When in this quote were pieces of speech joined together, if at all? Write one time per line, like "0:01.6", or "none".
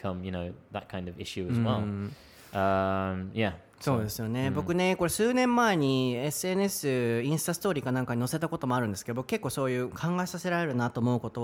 none